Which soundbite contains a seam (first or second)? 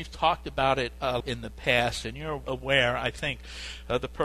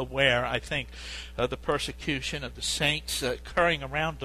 first